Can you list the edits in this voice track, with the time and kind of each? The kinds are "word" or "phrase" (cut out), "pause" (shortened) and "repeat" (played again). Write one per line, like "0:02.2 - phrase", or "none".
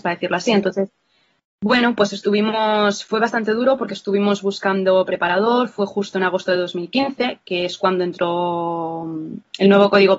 none